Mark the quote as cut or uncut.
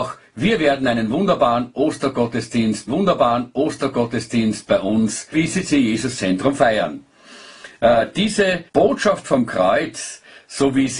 cut